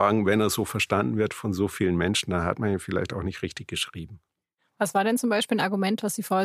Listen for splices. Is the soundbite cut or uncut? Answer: uncut